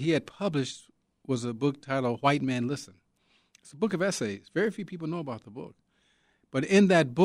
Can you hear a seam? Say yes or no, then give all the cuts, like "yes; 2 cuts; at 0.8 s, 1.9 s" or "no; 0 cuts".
no; 0 cuts